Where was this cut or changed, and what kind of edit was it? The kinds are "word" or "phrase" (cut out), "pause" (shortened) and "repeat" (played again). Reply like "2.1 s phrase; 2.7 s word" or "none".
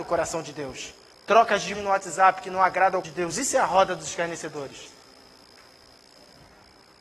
1.1 s pause; 1.7 s word; 3.0 s word